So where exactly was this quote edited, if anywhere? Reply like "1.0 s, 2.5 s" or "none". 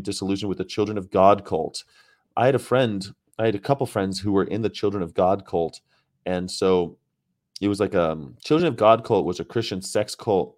none